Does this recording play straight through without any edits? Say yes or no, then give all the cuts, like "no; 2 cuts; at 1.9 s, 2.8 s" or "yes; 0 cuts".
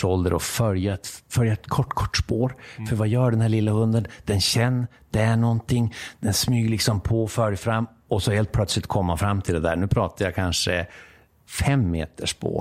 yes; 0 cuts